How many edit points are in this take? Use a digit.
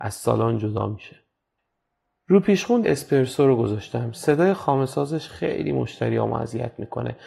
1